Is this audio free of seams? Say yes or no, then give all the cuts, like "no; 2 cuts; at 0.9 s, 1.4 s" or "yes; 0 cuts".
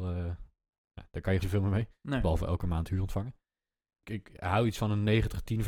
no; 1 cut; at 1.4 s